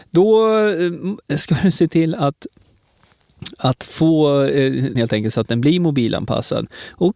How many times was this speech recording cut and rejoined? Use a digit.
1